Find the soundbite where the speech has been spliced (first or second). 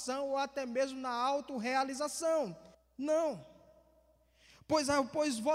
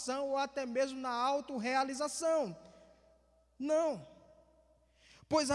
first